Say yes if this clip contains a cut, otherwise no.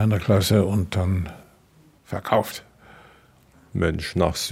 no